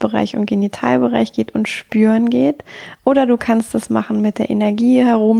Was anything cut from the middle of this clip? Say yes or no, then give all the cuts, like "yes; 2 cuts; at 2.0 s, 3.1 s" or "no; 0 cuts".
no; 0 cuts